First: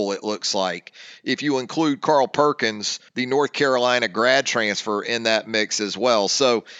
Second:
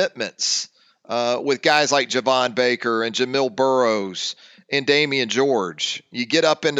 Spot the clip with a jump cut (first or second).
first